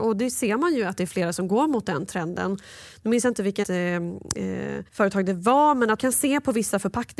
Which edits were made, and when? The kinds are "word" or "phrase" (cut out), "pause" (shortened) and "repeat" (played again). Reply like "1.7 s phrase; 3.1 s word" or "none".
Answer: 3.6 s word; 4.9 s pause; 6.0 s word